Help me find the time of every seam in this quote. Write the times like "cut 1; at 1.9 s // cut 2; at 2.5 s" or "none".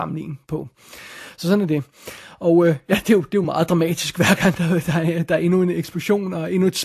none